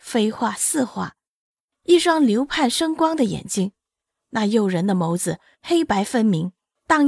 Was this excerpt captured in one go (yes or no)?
yes